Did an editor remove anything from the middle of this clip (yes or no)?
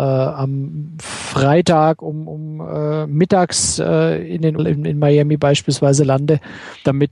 yes